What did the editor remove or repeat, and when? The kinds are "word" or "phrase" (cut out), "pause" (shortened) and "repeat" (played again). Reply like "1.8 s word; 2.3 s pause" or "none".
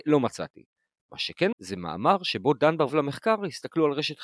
1.5 s word; 2.9 s word